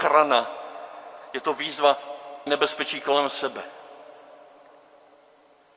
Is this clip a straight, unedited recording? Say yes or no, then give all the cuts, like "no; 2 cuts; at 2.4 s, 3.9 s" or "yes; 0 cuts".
no; 1 cut; at 2.5 s